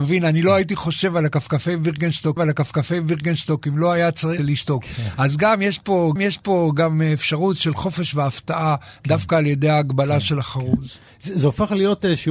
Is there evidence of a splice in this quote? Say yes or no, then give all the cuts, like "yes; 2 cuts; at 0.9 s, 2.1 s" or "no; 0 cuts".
yes; 3 cuts; at 2.4 s, 4.4 s, 6.2 s